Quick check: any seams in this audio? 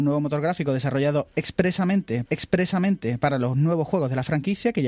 yes; 1 cut; at 2.2 s

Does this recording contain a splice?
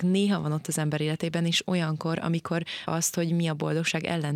yes; 1 cut; at 2.9 s

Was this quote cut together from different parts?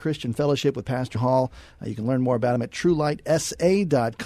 yes; 1 cut; at 1.1 s

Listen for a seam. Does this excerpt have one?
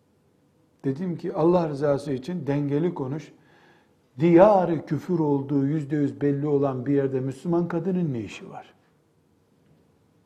no; 0 cuts

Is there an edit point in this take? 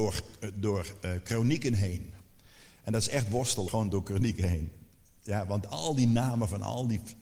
yes; 1 cut; at 3.7 s

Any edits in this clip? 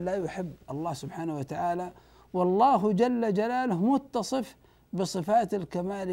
no; 0 cuts

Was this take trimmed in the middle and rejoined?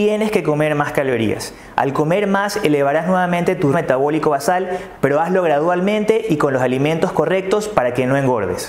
yes; 1 cut; at 3.7 s

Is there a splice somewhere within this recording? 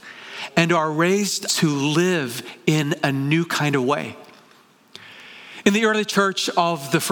yes; 1 cut; at 1.5 s

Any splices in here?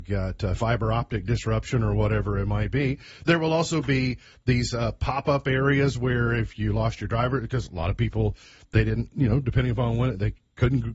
no; 0 cuts

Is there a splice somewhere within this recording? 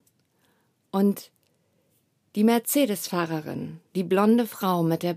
yes; 1 cut; at 3.9 s

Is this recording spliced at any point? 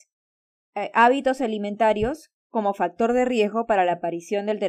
no; 0 cuts

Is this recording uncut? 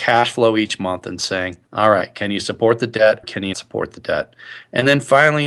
no; 3 cuts; at 1.6 s, 3.2 s, 3.5 s

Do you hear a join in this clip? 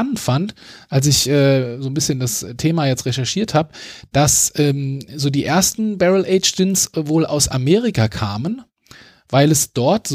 no; 0 cuts

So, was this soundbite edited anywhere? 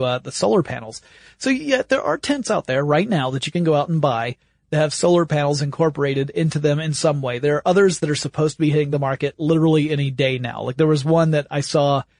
no; 0 cuts

